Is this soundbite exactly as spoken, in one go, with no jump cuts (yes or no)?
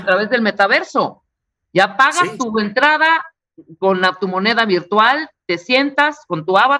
yes